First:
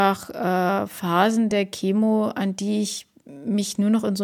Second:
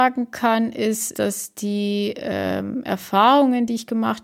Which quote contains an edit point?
second; 1 cut; at 1.1 s

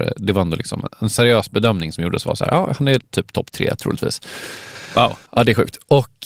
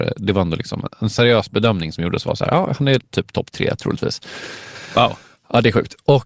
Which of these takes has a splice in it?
first; 1 cut; at 5.3 s

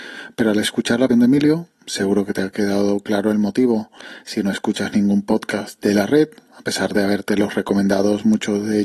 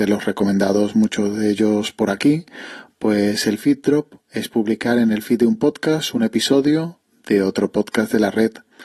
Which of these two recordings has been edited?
first; 1 cut; at 1.1 s

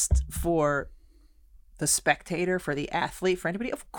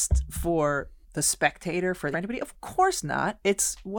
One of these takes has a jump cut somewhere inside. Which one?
second; 2 cuts; at 1.0 s, 2.1 s

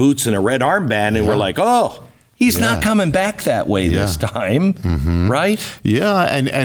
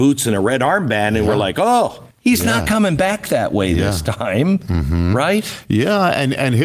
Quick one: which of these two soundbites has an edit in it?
second; 1 cut; at 2.1 s

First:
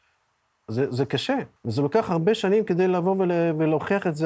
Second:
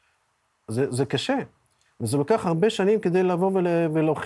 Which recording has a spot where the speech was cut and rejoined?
first; 1 cut; at 1.6 s

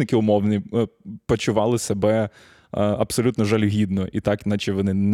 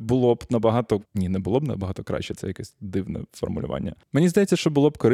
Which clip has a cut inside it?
second; 1 cut; at 1.1 s

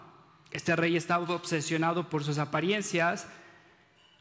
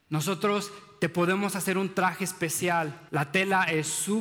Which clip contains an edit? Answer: second; 1 cut; at 3.1 s

